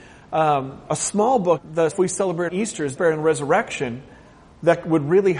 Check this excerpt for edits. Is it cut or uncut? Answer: cut